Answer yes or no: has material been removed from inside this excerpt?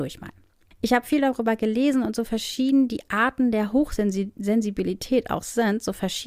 no